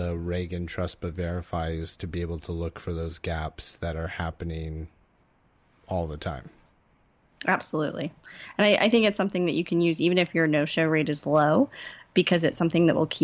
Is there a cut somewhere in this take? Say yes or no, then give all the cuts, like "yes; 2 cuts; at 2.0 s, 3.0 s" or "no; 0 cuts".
no; 0 cuts